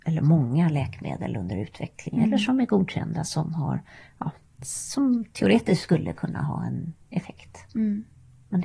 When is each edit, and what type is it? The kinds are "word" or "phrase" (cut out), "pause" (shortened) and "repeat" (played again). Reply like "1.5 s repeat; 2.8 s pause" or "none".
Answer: none